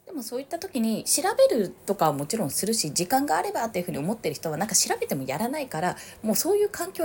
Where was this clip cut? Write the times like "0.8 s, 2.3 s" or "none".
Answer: 1.8 s